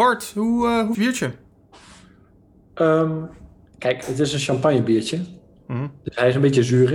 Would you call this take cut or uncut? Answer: cut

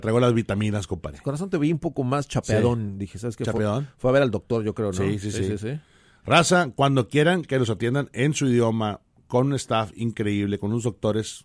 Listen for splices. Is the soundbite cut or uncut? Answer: uncut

